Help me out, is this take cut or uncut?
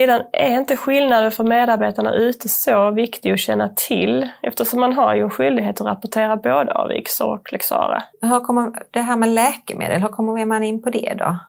cut